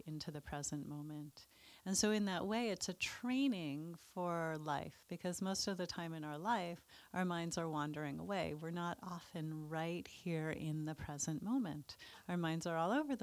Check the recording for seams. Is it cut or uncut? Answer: cut